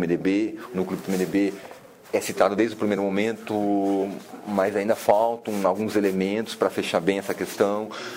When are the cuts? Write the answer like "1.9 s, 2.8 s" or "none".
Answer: none